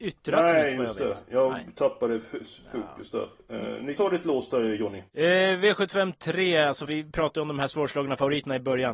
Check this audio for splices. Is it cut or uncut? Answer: cut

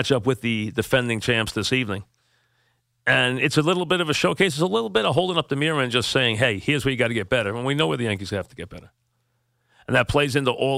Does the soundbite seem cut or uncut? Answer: uncut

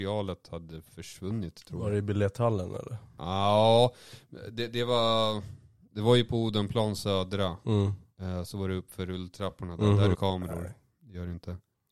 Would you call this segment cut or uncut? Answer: cut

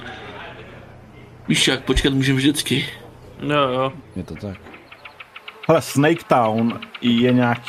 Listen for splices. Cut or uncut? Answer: cut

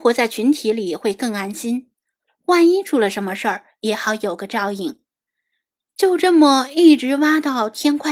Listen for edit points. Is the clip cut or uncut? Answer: uncut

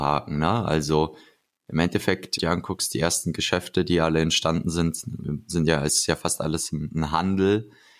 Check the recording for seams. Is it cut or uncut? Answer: cut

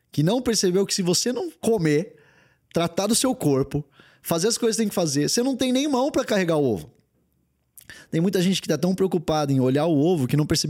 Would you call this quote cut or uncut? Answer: uncut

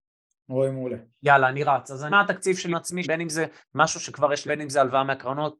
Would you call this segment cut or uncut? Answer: cut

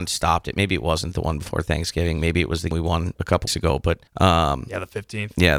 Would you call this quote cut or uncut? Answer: cut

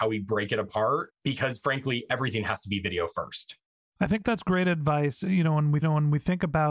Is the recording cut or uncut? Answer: cut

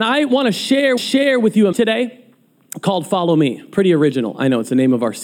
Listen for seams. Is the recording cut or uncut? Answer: cut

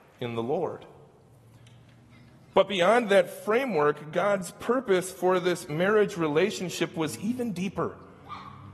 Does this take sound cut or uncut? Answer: uncut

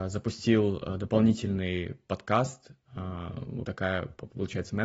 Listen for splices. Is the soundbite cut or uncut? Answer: cut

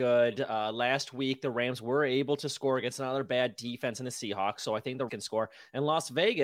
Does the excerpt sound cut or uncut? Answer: cut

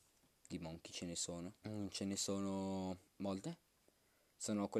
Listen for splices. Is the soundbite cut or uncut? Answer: cut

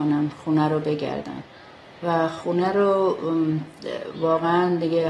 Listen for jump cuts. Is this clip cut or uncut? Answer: uncut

